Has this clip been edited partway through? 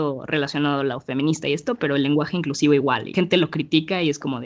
yes; 1 cut; at 3.1 s

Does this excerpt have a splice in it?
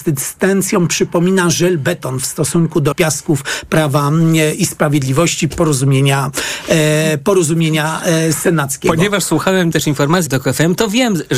yes; 4 cuts; at 2.9 s, 5.5 s, 9.7 s, 10.3 s

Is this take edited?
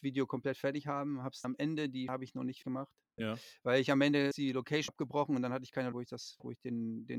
yes; 7 cuts; at 1.4 s, 2.1 s, 2.6 s, 3.2 s, 4.3 s, 4.9 s, 5.9 s

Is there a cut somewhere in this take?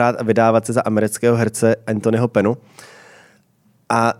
no; 0 cuts

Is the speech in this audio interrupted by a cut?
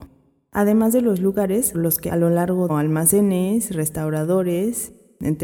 yes; 3 cuts; at 1.7 s, 2.1 s, 2.7 s

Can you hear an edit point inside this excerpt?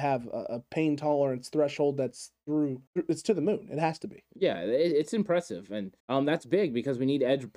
yes; 2 cuts; at 2.9 s, 6.0 s

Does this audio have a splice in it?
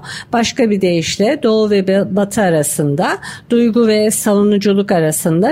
no; 0 cuts

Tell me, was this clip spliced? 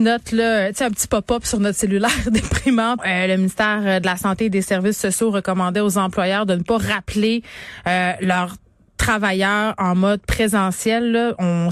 yes; 1 cut; at 3.0 s

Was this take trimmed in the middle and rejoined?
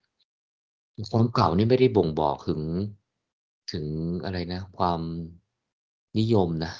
yes; 1 cut; at 3.3 s

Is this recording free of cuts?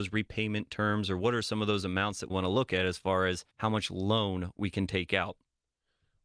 no; 2 cuts; at 2.3 s, 3.5 s

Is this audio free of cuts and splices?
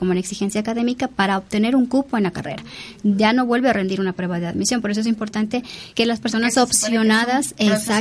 no; 1 cut; at 5.9 s

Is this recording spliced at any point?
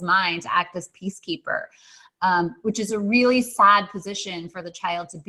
no; 0 cuts

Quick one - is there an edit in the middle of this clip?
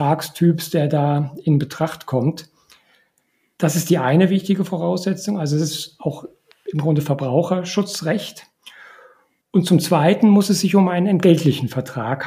no; 0 cuts

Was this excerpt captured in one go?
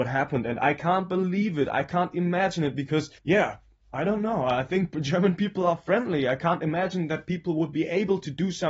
no; 1 cut; at 3.2 s

